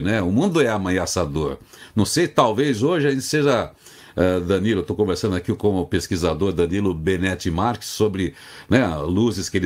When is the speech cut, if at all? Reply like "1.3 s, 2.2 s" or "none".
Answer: none